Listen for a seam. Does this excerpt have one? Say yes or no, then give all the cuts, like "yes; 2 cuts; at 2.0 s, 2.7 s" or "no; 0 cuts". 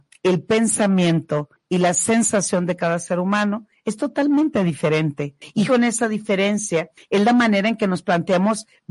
yes; 1 cut; at 5.7 s